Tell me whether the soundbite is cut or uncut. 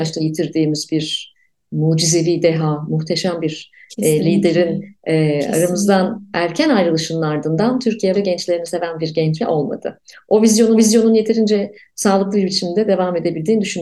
cut